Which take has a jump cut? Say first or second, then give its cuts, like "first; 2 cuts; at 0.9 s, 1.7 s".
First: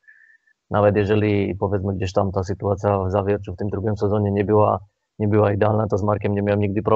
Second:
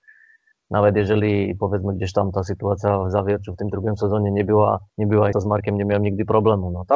second; 2 cuts; at 4.9 s, 5.3 s